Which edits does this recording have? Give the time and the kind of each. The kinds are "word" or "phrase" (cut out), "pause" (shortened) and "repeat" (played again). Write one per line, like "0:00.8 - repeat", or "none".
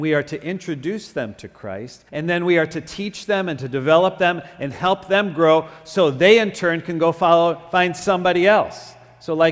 0:02.1 - pause